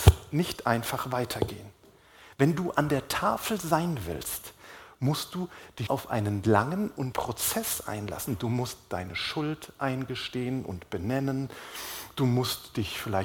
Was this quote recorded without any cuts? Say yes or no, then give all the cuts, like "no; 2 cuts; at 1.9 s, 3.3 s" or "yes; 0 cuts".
no; 2 cuts; at 5.9 s, 7.1 s